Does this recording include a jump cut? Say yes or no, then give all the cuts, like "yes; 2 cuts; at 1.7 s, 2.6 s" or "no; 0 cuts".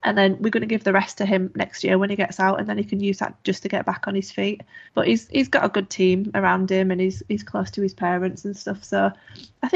yes; 1 cut; at 4.9 s